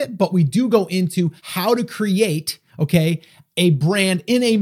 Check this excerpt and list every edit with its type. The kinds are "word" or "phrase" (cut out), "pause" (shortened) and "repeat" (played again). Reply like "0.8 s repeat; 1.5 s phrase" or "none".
1.4 s pause; 2.7 s pause